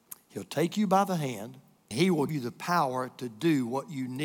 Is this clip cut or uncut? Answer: cut